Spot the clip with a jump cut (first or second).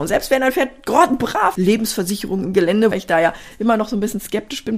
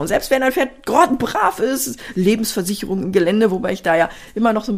first